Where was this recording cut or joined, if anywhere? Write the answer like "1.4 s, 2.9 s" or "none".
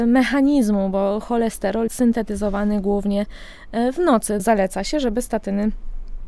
1.9 s, 4.4 s